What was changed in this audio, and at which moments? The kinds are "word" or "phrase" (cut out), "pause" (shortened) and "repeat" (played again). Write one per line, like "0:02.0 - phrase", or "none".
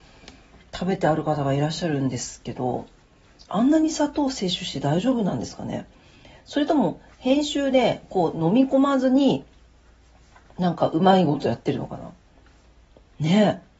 none